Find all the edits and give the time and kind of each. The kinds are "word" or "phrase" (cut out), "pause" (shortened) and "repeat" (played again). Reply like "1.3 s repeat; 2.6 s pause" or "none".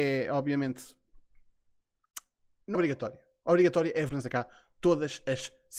2.7 s word; 4.1 s word

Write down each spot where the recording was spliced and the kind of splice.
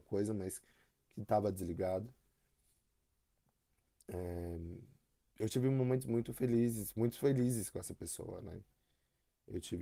none

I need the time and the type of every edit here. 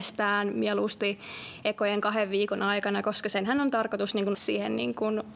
4.3 s word

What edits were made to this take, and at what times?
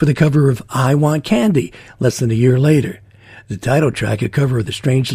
none

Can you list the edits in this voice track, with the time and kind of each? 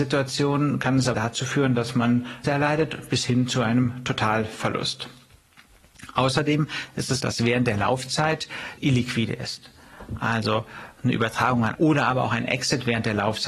1.1 s word; 2.4 s phrase; 7.2 s word; 8.8 s phrase; 11.7 s phrase

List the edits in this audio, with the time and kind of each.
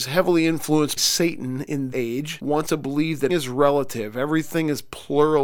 1.0 s word; 1.9 s word; 2.7 s word; 3.3 s word

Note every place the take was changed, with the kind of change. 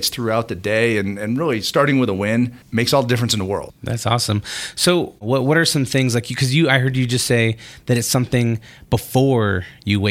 2.6 s pause

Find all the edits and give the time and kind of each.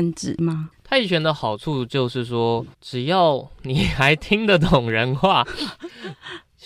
2.7 s pause

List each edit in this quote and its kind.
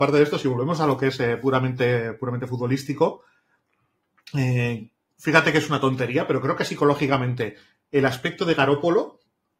none

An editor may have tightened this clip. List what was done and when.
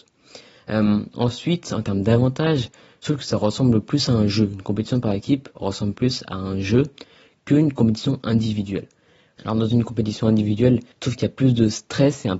10.9 s pause

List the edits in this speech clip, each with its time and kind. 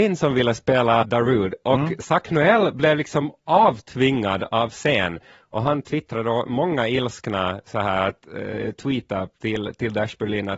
1.0 s word

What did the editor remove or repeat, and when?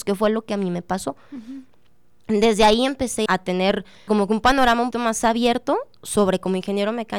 3.3 s word; 4.1 s word; 4.9 s word

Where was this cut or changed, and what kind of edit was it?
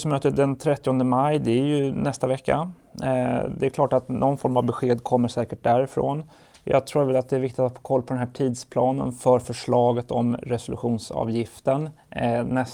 none

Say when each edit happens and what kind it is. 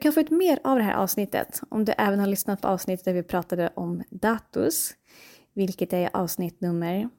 none

